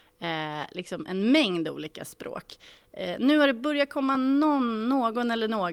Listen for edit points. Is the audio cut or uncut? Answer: uncut